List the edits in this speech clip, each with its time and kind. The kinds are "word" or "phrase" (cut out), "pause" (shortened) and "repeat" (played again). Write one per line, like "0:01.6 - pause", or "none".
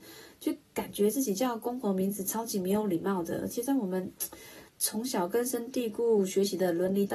0:04.7 - pause